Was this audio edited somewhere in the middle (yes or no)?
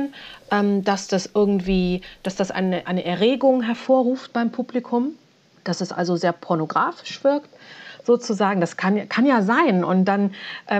yes